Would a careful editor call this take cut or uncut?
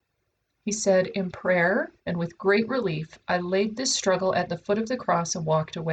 cut